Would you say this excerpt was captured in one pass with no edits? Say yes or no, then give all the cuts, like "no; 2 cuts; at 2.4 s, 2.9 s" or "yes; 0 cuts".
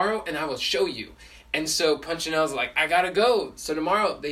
yes; 0 cuts